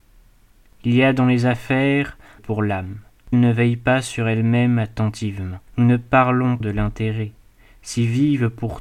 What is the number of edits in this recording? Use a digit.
4